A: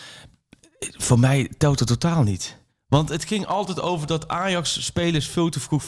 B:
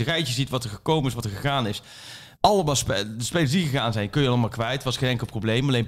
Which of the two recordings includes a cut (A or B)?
B